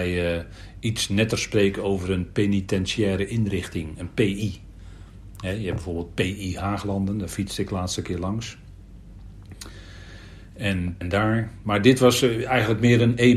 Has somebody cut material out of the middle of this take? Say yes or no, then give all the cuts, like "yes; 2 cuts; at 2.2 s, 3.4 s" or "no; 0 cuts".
yes; 1 cut; at 11.0 s